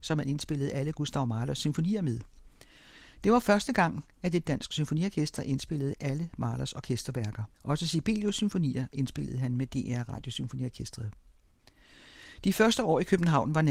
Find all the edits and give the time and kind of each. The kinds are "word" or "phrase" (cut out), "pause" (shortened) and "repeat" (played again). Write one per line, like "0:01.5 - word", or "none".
0:07.5 - pause